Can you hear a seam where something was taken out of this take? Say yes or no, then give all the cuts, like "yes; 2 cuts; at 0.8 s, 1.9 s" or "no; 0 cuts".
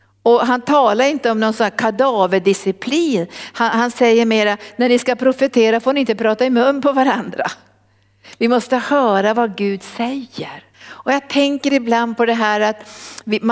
yes; 1 cut; at 10.7 s